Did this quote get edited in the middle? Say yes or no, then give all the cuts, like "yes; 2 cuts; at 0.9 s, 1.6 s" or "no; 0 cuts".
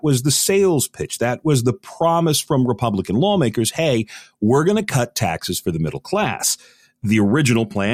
no; 0 cuts